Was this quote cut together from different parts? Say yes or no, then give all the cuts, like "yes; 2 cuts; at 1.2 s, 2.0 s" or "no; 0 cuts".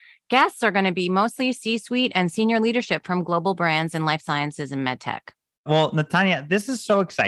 no; 0 cuts